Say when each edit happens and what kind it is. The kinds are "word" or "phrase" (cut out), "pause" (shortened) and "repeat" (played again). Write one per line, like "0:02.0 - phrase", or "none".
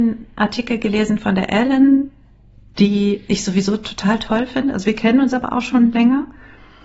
none